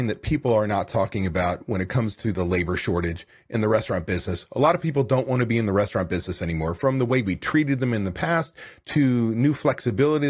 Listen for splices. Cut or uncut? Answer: uncut